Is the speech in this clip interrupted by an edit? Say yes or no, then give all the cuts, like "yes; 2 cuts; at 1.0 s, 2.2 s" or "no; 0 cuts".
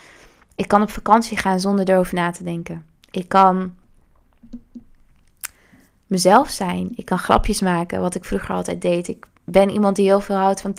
no; 0 cuts